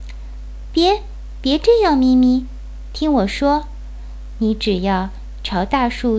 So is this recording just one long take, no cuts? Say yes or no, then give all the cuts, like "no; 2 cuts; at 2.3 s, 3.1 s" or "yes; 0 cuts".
yes; 0 cuts